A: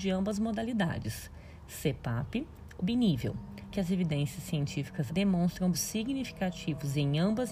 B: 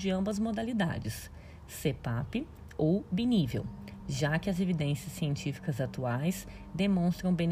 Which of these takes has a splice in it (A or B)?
A